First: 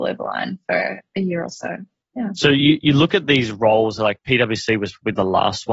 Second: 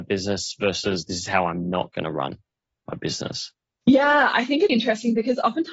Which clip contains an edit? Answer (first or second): second